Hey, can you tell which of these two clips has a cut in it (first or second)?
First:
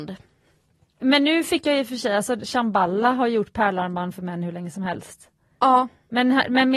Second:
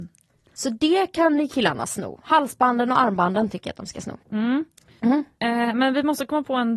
second